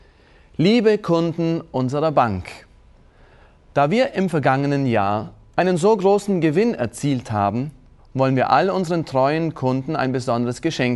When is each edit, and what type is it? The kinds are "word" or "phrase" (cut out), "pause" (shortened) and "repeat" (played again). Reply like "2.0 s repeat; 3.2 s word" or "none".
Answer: 8.0 s pause